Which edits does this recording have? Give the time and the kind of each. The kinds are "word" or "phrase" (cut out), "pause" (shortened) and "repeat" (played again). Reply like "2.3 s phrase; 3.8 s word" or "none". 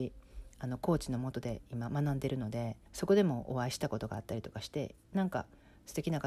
2.9 s pause